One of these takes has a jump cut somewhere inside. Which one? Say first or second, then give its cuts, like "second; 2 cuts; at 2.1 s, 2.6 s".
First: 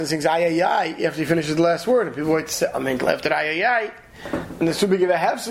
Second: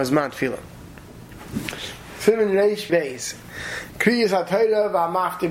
second; 1 cut; at 2.9 s